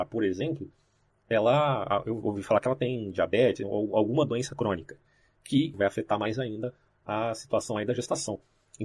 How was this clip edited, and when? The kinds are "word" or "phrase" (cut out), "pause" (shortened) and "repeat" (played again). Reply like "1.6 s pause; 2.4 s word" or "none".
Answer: none